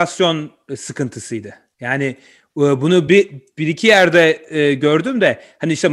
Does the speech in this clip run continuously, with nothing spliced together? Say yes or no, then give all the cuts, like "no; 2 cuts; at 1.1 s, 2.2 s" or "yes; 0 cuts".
yes; 0 cuts